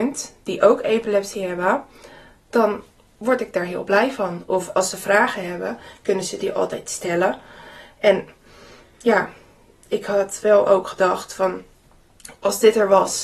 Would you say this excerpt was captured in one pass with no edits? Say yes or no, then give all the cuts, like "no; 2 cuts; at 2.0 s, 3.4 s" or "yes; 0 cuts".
yes; 0 cuts